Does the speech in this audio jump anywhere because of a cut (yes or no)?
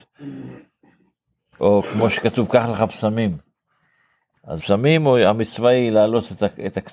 yes